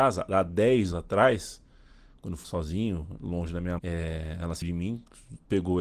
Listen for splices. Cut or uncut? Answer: cut